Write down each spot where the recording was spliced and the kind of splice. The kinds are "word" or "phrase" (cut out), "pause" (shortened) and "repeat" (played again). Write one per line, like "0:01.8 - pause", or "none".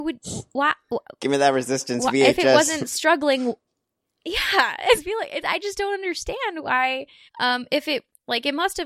0:03.7 - pause
0:05.0 - word
0:07.3 - pause